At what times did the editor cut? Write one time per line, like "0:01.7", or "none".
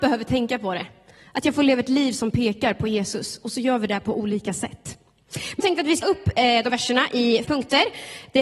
0:05.6
0:06.0
0:06.7
0:07.4